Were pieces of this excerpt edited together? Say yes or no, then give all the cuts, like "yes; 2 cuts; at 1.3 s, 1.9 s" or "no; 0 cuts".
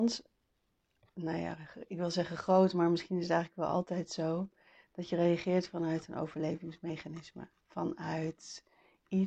no; 0 cuts